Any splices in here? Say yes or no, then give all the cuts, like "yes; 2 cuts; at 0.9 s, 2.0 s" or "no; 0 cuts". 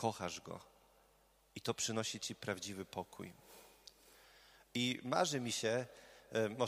no; 0 cuts